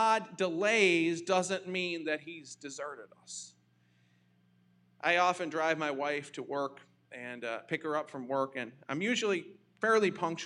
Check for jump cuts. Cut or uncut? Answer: uncut